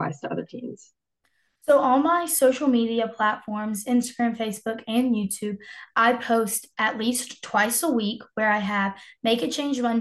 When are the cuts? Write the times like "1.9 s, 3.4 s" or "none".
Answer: none